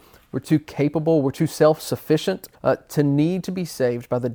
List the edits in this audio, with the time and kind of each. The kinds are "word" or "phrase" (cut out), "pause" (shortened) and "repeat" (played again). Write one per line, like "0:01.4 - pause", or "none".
0:02.5 - pause